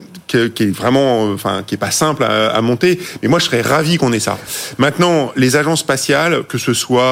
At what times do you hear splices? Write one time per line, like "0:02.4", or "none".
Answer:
none